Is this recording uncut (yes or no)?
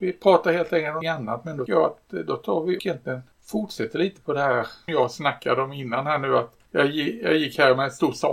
no